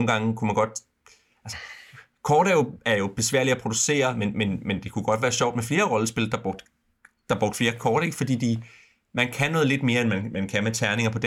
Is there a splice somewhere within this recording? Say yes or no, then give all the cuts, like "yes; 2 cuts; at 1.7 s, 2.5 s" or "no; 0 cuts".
no; 0 cuts